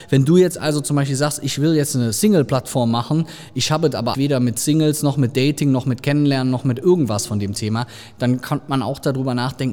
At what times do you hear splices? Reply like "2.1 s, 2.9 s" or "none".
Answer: 4.1 s